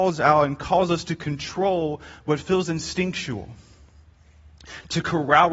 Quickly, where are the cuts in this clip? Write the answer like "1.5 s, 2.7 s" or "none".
none